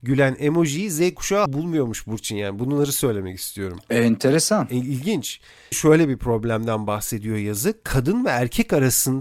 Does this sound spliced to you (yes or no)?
yes